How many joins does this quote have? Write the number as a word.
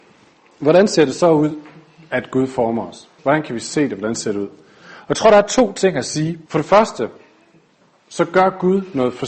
two